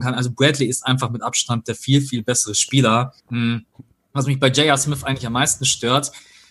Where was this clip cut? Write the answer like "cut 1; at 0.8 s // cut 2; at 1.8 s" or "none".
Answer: cut 1; at 3.2 s